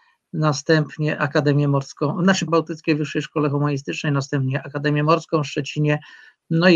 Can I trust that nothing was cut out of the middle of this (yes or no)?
no